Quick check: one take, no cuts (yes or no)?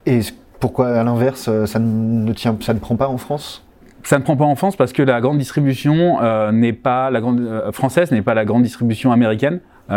no